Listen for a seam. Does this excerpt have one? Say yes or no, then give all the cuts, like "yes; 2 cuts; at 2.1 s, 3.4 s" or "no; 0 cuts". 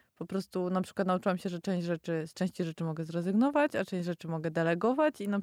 no; 0 cuts